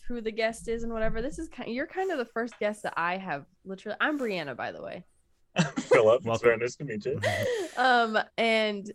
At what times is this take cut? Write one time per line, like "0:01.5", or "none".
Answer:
none